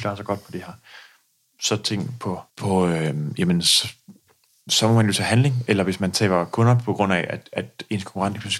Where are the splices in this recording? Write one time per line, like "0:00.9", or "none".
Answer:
0:02.5